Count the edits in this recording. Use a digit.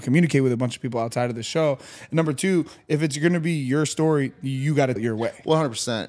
1